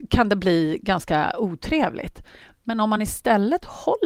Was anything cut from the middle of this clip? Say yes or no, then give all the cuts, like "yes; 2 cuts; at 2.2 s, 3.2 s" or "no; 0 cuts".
no; 0 cuts